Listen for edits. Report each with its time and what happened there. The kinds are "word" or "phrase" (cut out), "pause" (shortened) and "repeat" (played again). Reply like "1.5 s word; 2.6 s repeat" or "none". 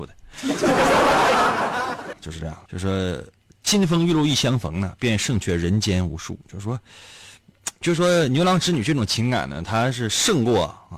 2.1 s word; 2.7 s word; 7.8 s word